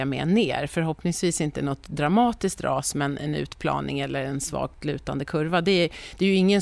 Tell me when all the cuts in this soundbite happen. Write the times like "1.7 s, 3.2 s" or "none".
none

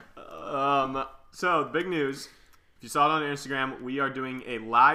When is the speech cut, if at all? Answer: none

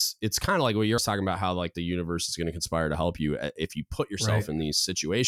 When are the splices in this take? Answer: 1.0 s

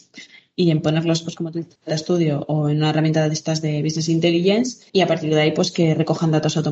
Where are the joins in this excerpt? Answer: 1.7 s, 4.9 s

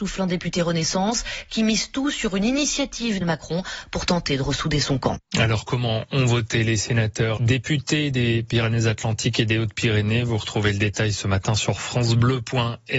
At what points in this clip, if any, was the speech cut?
3.2 s, 7.4 s

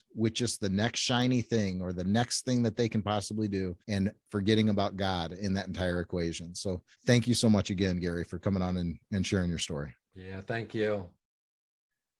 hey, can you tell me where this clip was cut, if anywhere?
3.8 s, 6.9 s, 10.0 s

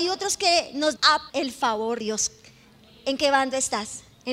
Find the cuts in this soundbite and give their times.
1.0 s, 1.3 s, 2.0 s

